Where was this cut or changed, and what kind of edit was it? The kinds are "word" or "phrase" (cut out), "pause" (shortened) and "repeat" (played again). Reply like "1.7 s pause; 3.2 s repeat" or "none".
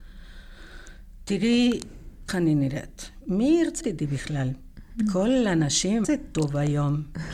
2.3 s word; 3.8 s word; 6.0 s phrase